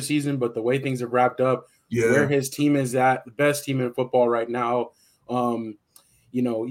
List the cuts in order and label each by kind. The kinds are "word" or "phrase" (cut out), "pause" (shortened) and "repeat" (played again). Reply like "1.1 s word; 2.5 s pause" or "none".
none